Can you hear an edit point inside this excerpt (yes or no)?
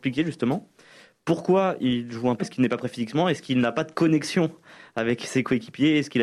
yes